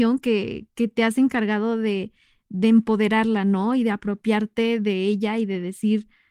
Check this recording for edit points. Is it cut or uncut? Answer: uncut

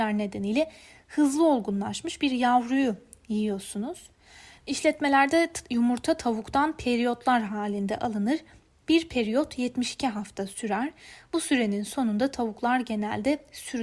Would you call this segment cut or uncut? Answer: uncut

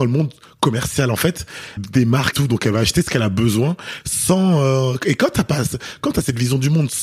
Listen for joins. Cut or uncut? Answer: cut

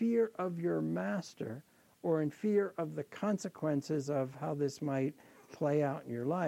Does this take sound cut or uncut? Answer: uncut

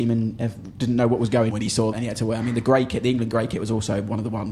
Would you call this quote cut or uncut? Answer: cut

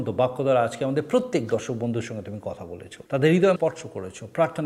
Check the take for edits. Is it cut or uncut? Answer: cut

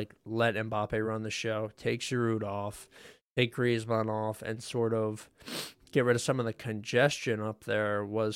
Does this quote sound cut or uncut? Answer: uncut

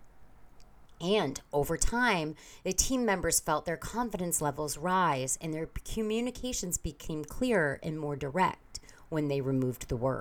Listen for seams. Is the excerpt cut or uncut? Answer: uncut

